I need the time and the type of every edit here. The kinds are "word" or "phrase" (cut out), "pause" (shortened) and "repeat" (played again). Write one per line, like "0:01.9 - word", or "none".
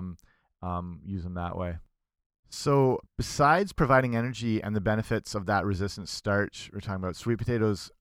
0:03.1 - pause